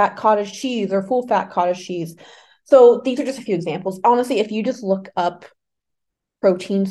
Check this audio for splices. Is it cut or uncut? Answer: uncut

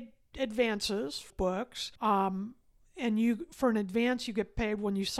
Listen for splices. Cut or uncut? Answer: cut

